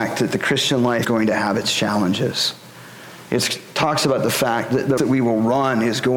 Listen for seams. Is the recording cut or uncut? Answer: cut